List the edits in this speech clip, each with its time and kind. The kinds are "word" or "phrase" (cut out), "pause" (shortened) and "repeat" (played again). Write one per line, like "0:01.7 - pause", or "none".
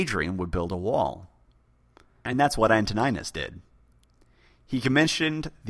none